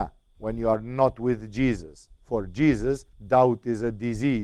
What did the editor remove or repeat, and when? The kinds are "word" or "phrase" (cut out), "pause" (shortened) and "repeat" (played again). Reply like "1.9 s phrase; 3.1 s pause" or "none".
2.1 s pause; 3.1 s pause